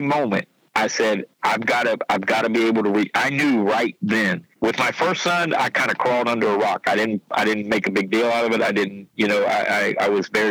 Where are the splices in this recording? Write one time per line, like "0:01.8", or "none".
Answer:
0:01.3
0:04.6